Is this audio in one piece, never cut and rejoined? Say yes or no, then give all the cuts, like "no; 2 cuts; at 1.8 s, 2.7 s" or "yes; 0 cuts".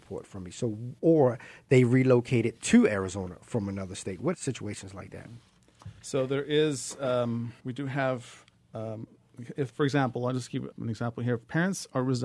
no; 7 cuts; at 1.0 s, 4.3 s, 6.0 s, 7.6 s, 8.5 s, 9.7 s, 10.7 s